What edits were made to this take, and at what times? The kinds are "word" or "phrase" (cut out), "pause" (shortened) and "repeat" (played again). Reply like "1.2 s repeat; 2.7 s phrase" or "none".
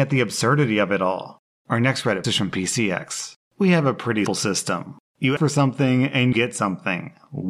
2.2 s word; 4.3 s word; 5.4 s word; 6.3 s word